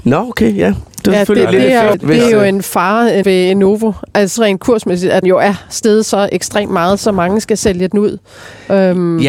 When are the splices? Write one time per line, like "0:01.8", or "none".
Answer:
0:01.9
0:03.2
0:04.4
0:05.2